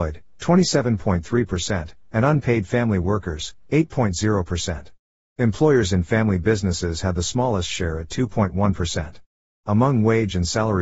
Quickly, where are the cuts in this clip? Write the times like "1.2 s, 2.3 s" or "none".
none